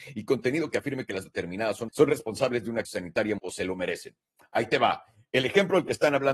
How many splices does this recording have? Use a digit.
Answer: 4